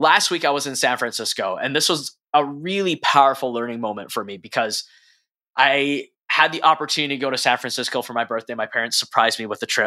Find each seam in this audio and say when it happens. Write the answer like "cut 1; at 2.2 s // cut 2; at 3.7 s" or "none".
none